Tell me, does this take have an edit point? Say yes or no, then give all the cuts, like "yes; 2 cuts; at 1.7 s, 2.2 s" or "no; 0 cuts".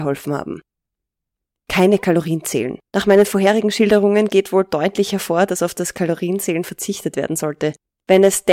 yes; 1 cut; at 2.9 s